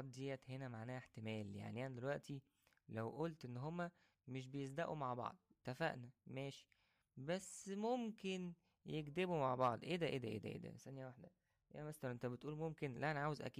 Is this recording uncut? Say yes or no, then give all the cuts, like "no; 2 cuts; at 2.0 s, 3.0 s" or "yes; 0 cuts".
yes; 0 cuts